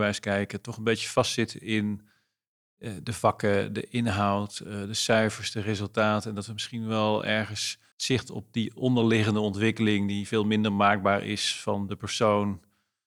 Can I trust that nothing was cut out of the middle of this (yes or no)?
no